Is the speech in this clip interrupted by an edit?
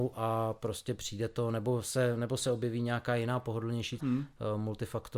yes; 1 cut; at 4.0 s

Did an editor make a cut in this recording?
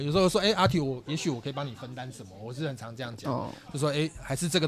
no; 0 cuts

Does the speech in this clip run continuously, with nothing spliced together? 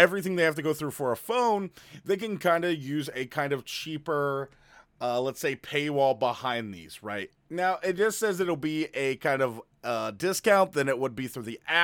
yes; 0 cuts

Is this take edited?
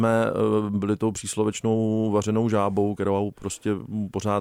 no; 0 cuts

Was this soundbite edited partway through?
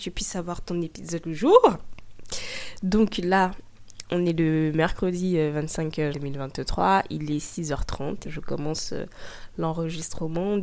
yes; 3 cuts; at 1.2 s, 6.1 s, 8.2 s

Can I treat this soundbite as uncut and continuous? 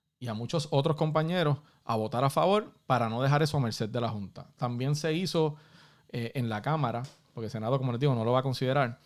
yes; 0 cuts

